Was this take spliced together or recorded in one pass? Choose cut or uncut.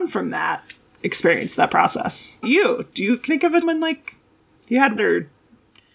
cut